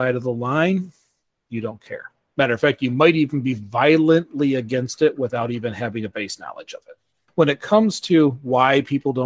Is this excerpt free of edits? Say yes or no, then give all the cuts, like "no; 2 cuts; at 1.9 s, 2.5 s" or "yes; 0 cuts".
yes; 0 cuts